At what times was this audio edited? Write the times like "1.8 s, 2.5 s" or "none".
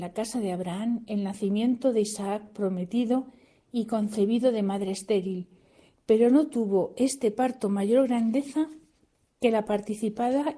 none